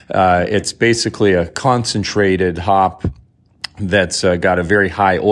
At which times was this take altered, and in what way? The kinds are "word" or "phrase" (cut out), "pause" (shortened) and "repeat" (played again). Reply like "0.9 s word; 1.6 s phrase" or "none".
none